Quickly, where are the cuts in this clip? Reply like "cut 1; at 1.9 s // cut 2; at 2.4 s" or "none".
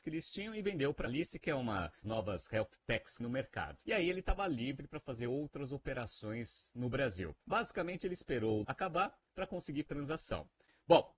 cut 1; at 1.1 s // cut 2; at 2.0 s // cut 3; at 3.2 s // cut 4; at 3.8 s // cut 5; at 7.4 s // cut 6; at 8.6 s // cut 7; at 9.9 s

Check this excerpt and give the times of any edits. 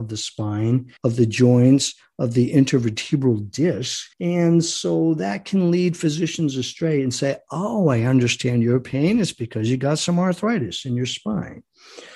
cut 1; at 1.0 s // cut 2; at 4.1 s

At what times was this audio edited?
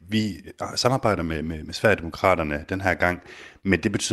none

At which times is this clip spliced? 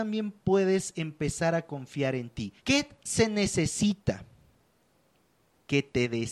cut 1; at 2.6 s

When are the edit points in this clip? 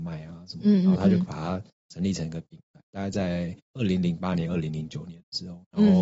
cut 1; at 3.6 s

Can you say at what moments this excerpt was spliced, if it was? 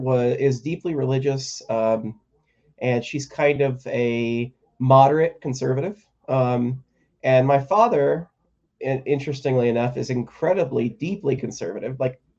none

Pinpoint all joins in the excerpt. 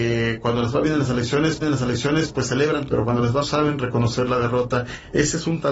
cut 1; at 1.6 s // cut 2; at 2.9 s // cut 3; at 3.4 s

